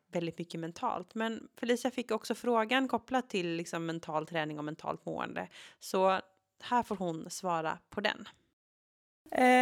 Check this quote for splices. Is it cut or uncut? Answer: uncut